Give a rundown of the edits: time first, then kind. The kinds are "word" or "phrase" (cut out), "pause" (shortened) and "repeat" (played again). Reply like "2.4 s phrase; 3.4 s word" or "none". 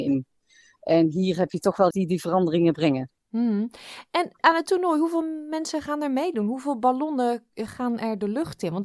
1.9 s phrase; 3.2 s pause; 4.4 s pause